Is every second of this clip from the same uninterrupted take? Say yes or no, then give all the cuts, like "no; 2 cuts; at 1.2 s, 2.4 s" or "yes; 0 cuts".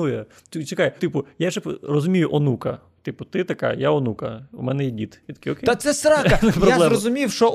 no; 1 cut; at 1.0 s